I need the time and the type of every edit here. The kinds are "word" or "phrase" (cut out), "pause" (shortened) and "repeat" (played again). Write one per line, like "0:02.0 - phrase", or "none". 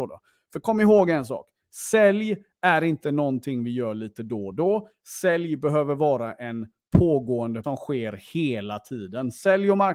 0:07.6 - word